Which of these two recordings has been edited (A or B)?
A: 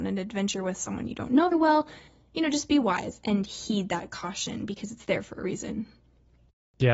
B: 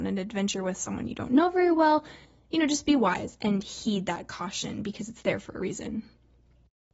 A